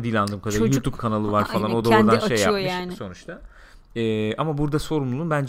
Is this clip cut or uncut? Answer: uncut